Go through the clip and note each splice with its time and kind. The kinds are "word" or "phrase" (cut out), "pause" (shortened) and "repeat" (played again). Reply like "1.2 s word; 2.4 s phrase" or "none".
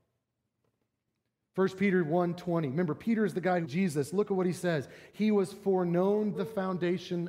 3.6 s phrase; 6.3 s word